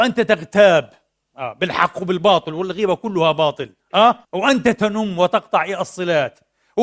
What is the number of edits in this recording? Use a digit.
1